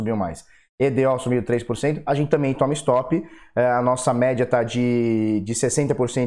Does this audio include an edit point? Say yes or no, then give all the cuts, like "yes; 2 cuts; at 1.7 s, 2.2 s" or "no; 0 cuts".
no; 0 cuts